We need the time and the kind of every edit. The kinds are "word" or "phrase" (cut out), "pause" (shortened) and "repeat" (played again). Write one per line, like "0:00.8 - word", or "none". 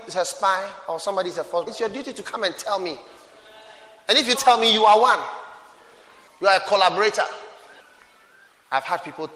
0:01.7 - word
0:04.3 - word

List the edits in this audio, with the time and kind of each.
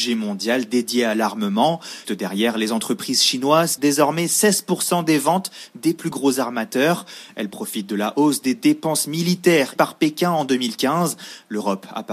0:02.0 - word
0:03.8 - phrase
0:09.8 - word

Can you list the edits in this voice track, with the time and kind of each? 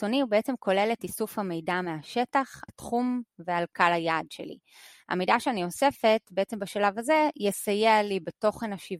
0:02.7 - word

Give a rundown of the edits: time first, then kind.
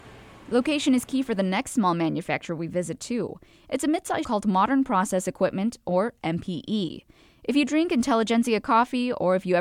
0:04.2 - phrase

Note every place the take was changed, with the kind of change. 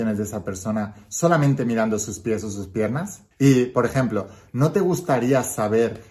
0:03.3 - pause

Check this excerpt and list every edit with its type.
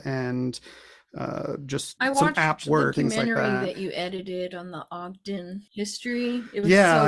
0:02.0 - word
0:02.9 - word

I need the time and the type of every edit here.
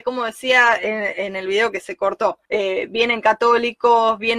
0:02.5 - pause

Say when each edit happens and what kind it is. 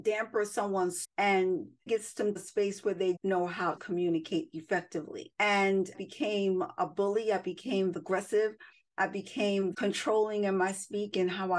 0:01.0 - word
0:01.9 - word
0:02.4 - word
0:03.2 - word
0:03.8 - word
0:05.9 - word
0:07.9 - word
0:09.7 - word

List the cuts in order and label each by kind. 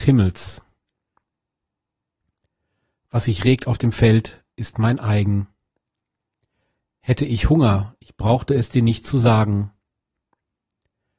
none

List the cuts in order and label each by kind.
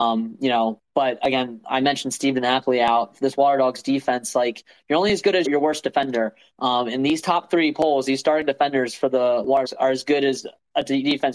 0:05.4 - word
0:09.6 - word

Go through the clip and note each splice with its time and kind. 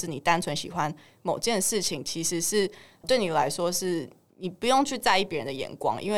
none

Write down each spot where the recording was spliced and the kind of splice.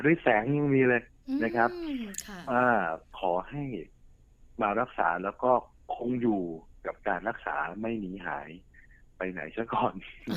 none

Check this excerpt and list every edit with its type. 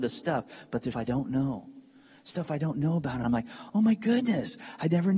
0:00.9 - word
0:03.2 - word

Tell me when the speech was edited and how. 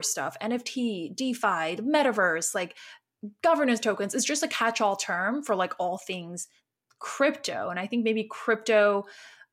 none

